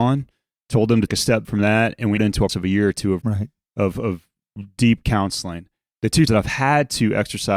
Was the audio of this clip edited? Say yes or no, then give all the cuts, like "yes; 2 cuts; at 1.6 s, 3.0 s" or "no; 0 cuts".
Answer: yes; 6 cuts; at 1.1 s, 1.4 s, 2.2 s, 2.5 s, 3.2 s, 6.3 s